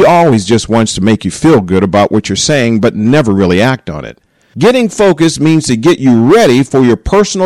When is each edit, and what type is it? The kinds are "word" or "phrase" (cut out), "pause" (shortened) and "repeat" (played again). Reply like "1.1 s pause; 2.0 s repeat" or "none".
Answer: none